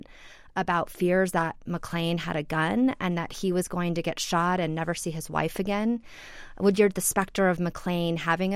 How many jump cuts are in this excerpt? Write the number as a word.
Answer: one